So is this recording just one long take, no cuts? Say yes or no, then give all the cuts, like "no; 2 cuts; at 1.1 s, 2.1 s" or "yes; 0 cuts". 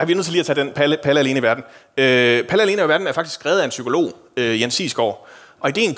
yes; 0 cuts